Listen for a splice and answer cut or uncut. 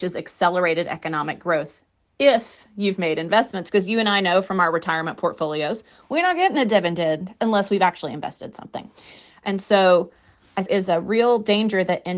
cut